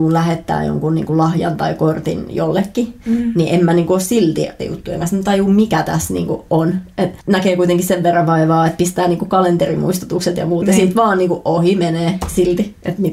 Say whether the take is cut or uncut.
cut